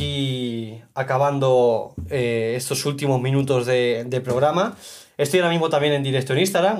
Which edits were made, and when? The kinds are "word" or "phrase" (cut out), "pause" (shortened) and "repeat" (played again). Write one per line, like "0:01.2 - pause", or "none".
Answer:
none